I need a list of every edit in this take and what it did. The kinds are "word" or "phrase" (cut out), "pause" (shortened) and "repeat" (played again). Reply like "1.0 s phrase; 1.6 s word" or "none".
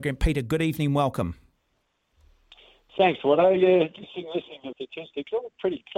4.0 s word; 4.7 s word